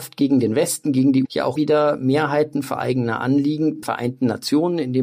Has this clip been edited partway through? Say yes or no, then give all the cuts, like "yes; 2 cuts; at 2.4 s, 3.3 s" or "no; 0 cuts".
yes; 3 cuts; at 1.2 s, 1.6 s, 3.8 s